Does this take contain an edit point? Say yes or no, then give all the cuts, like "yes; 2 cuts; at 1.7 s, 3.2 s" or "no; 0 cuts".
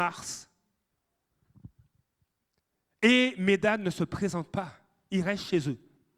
no; 0 cuts